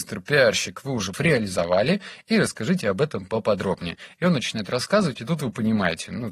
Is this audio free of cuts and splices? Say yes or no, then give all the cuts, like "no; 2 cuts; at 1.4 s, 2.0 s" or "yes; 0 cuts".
no; 1 cut; at 1.1 s